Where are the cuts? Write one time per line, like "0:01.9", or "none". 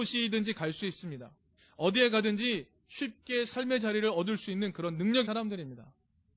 0:01.6
0:05.2